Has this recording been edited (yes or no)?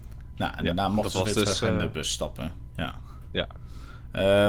no